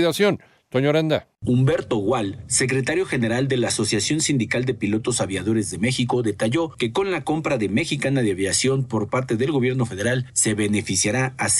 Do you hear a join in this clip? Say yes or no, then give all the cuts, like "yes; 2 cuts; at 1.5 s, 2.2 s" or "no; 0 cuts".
no; 0 cuts